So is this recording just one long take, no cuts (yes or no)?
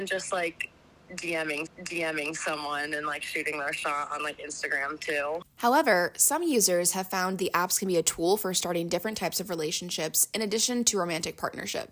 no